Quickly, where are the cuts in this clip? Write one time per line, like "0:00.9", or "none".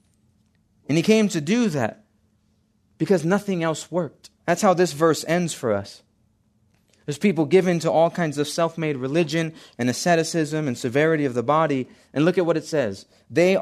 0:04.4